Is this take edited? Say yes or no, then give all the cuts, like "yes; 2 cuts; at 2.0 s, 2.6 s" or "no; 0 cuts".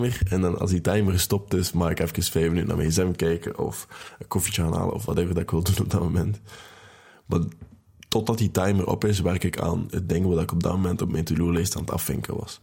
no; 0 cuts